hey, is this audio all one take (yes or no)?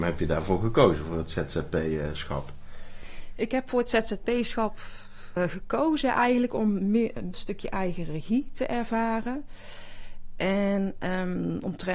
no